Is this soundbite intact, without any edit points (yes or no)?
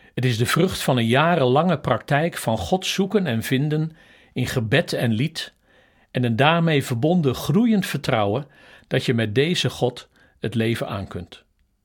yes